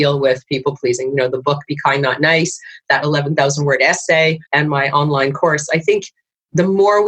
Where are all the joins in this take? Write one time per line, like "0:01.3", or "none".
0:04.4